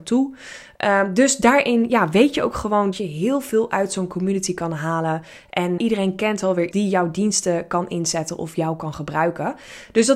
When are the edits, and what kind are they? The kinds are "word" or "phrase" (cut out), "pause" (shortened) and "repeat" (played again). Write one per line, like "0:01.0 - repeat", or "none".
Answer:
0:02.9 - word
0:05.8 - word
0:06.7 - word